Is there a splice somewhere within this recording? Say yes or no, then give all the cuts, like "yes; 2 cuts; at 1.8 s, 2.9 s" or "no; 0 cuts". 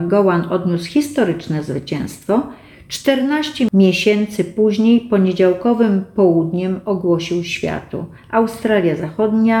no; 0 cuts